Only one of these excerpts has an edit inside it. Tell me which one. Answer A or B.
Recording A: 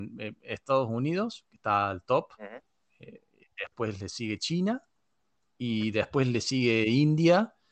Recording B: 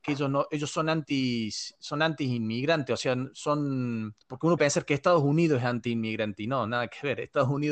B